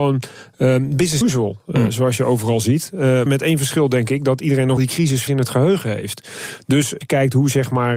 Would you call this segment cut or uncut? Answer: cut